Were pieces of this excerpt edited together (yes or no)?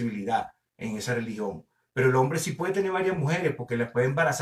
no